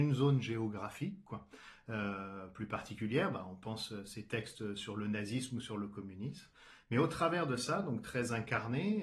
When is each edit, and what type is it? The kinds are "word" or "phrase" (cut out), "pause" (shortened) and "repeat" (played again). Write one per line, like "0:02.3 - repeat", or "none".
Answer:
none